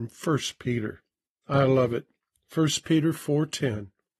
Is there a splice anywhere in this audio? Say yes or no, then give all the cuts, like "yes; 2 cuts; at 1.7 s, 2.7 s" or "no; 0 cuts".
no; 0 cuts